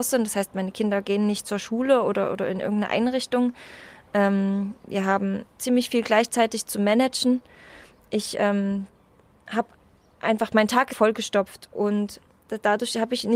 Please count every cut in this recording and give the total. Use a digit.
1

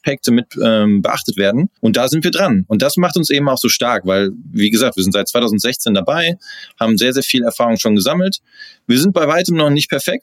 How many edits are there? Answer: 1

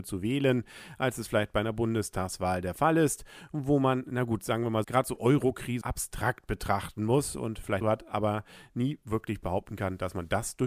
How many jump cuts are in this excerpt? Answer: 3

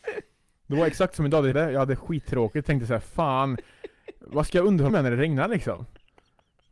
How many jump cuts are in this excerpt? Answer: 2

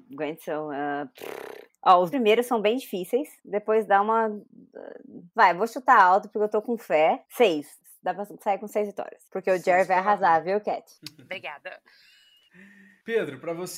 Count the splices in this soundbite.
1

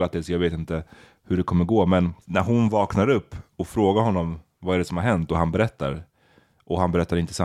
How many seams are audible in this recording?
1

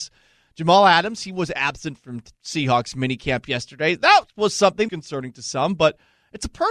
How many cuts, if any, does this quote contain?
1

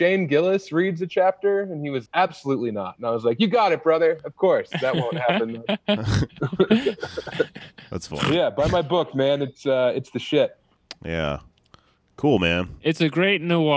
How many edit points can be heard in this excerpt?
1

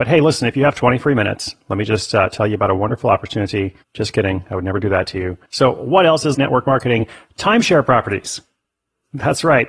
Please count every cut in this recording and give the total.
3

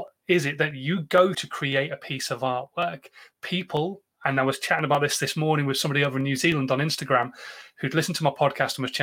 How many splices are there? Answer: 1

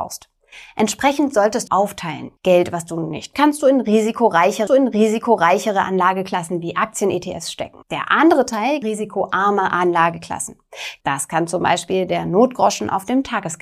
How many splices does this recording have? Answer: 6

